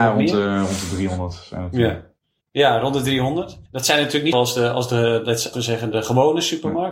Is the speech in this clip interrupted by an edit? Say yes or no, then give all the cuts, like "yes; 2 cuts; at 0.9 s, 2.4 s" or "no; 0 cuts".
yes; 5 cuts; at 2.4 s, 3.7 s, 4.3 s, 5.5 s, 5.9 s